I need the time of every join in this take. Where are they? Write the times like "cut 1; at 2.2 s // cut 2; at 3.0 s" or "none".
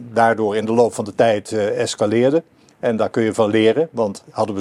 none